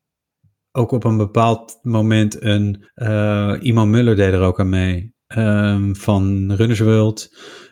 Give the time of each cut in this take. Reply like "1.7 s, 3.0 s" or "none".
2.8 s, 5.2 s